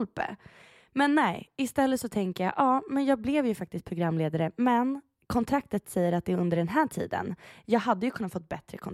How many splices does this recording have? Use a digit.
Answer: 0